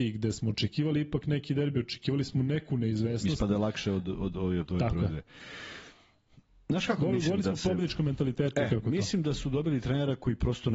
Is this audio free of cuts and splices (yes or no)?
yes